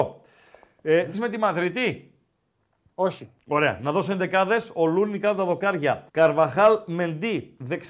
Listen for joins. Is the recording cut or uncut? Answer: cut